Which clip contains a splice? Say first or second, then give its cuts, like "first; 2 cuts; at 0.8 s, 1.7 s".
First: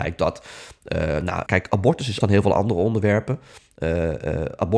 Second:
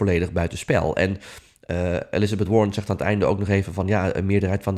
first; 2 cuts; at 1.5 s, 2.2 s